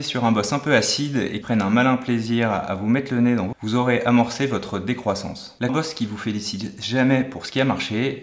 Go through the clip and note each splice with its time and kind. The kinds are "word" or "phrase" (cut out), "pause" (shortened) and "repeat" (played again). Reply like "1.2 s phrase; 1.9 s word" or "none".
1.4 s word; 3.5 s word; 5.7 s phrase